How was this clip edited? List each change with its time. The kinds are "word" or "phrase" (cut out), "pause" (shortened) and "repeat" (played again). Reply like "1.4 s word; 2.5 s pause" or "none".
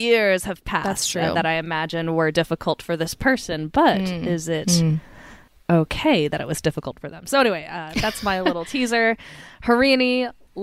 none